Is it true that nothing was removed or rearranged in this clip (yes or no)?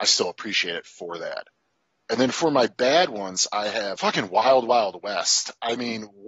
yes